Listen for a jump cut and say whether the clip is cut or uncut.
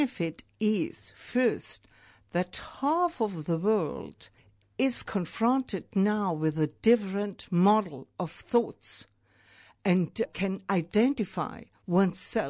cut